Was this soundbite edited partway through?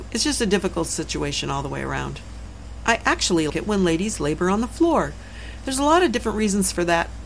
yes; 1 cut; at 3.5 s

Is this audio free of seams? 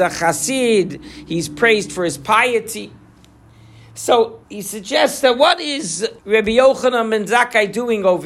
no; 2 cuts; at 4.4 s, 6.2 s

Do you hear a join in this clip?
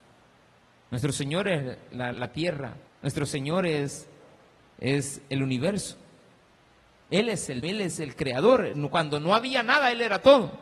yes; 3 cuts; at 2.1 s, 2.9 s, 7.6 s

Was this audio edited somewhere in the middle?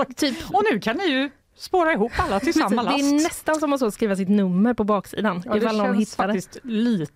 no; 0 cuts

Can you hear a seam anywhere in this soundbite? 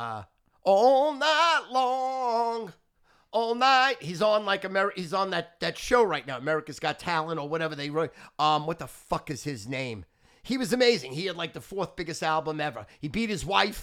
no; 0 cuts

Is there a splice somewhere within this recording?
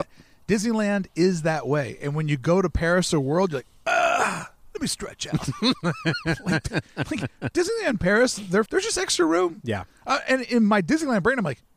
yes; 1 cut; at 8.7 s

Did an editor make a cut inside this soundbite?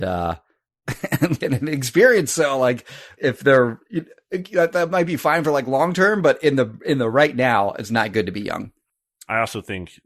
yes; 2 cuts; at 1.4 s, 3.2 s

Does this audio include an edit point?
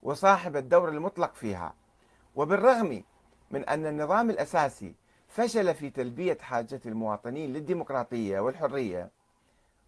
no; 0 cuts

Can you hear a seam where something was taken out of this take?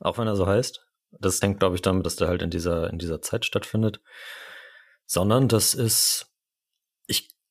yes; 2 cuts; at 1.4 s, 2.0 s

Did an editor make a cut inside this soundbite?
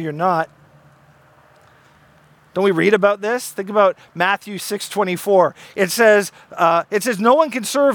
no; 0 cuts

